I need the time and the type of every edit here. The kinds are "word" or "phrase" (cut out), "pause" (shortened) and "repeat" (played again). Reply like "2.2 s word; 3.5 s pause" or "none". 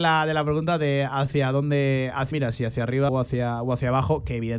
2.3 s word; 3.1 s word